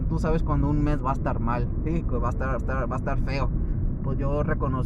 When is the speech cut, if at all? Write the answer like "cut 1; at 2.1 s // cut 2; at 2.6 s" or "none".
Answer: cut 1; at 2.6 s